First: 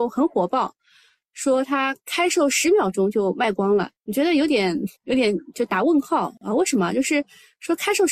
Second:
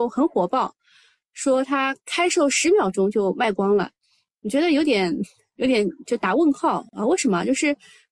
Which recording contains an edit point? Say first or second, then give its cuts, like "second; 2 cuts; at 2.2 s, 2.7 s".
first; 2 cuts; at 4.0 s, 5.0 s